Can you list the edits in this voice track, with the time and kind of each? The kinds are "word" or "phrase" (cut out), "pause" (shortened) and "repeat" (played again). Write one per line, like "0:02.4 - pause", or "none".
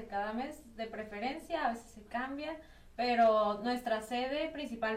none